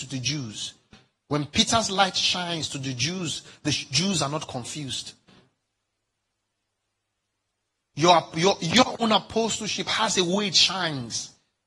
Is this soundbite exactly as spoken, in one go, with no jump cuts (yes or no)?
yes